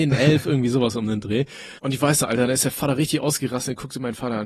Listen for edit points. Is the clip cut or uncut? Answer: cut